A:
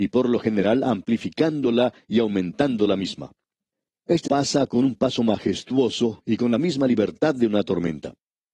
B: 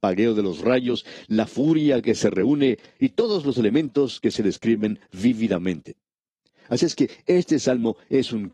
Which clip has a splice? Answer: A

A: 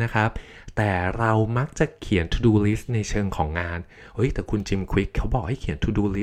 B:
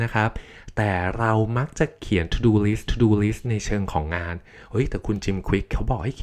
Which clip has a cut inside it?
B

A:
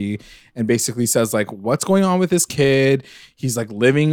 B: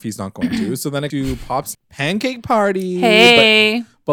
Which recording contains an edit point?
B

